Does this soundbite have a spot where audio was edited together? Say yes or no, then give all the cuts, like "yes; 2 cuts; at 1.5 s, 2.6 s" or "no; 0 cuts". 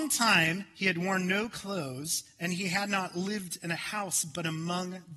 no; 0 cuts